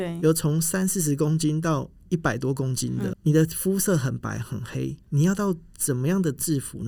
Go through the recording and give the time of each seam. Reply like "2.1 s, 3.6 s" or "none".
3.1 s